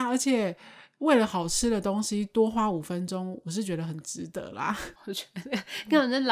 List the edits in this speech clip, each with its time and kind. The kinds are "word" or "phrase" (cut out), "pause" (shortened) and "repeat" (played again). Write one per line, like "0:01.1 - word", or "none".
0:05.0 - pause

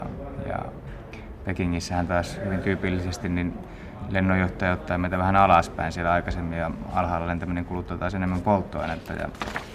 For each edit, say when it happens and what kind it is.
none

